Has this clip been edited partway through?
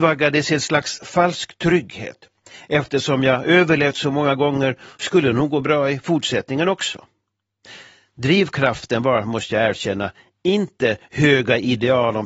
no; 0 cuts

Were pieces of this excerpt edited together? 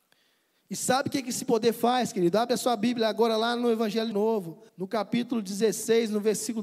yes; 2 cuts; at 4.1 s, 4.7 s

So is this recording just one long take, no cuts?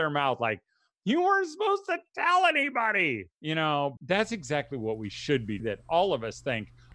no; 3 cuts; at 3.3 s, 4.0 s, 5.6 s

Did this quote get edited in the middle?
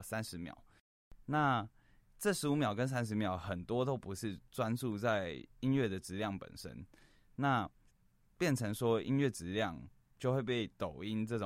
yes; 2 cuts; at 5.5 s, 7.9 s

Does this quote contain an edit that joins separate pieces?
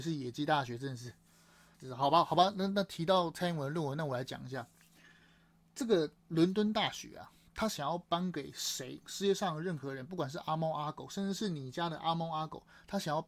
yes; 2 cuts; at 1.7 s, 6.2 s

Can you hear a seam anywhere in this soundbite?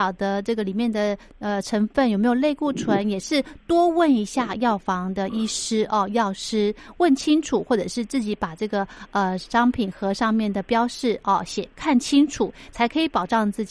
no; 0 cuts

